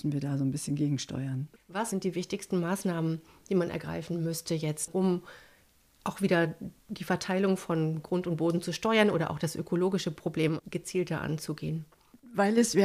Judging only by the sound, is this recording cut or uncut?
uncut